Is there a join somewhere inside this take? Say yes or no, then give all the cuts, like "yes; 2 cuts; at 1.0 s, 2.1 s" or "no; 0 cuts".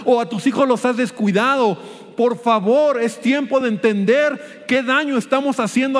no; 0 cuts